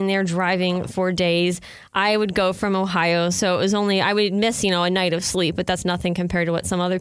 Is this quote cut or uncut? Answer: uncut